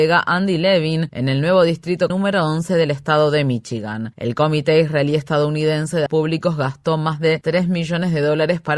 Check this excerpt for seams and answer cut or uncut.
cut